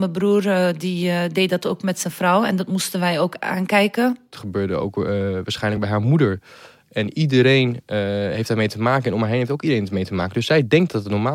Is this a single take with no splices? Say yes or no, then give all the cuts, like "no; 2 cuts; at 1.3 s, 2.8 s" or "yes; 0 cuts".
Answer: yes; 0 cuts